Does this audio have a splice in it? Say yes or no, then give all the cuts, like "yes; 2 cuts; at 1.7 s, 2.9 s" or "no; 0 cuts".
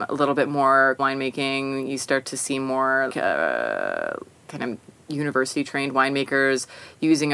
yes; 2 cuts; at 1.0 s, 3.1 s